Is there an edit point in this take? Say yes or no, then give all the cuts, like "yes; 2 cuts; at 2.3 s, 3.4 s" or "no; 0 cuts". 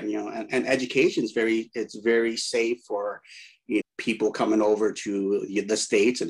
yes; 1 cut; at 3.8 s